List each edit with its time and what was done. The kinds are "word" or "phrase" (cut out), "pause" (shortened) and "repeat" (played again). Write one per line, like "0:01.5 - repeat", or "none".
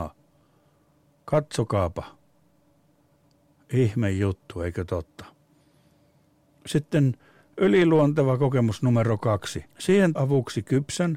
0:09.7 - word
0:10.1 - word